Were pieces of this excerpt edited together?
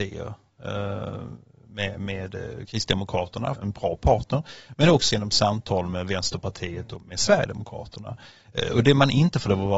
yes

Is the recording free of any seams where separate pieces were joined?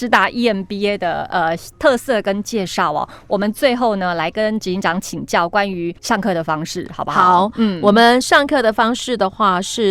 no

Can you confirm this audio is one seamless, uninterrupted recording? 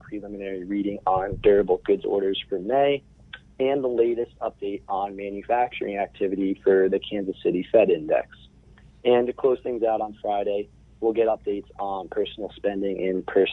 yes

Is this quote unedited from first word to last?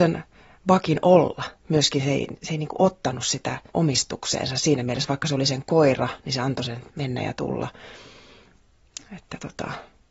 no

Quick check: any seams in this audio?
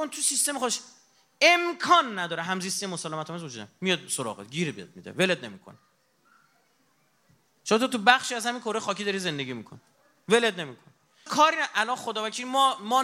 yes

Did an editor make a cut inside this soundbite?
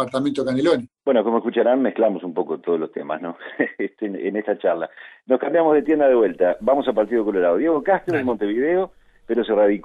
yes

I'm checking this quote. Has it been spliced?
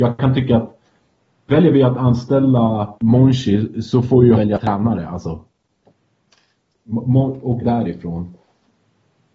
yes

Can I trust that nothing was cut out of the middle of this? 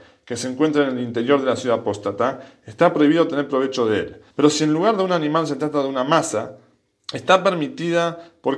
no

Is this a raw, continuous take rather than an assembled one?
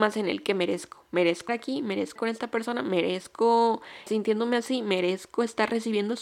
no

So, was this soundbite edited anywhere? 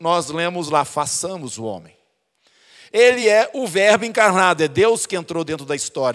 no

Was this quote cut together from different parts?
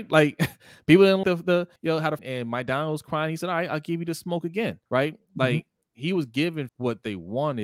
yes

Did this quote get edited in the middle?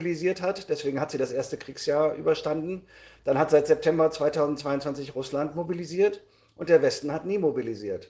no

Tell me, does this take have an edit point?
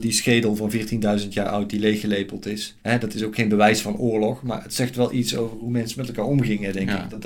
yes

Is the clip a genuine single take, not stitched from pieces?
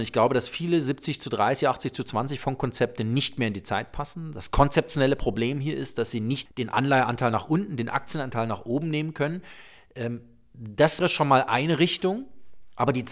no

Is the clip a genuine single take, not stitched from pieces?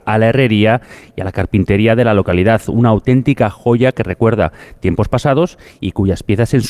yes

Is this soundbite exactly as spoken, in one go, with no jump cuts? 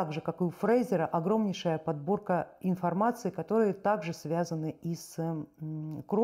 yes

